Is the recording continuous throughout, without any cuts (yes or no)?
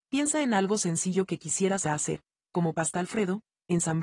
no